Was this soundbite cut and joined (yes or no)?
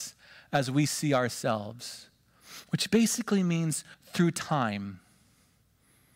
yes